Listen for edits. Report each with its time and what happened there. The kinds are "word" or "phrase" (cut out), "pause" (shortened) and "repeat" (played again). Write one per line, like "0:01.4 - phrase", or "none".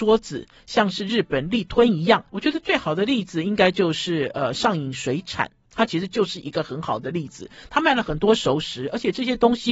0:02.3 - pause